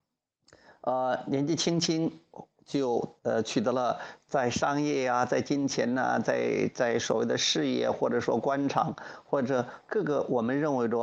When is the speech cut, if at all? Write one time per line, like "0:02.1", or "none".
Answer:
0:03.2